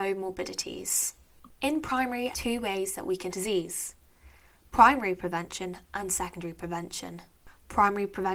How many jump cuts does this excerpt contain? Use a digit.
3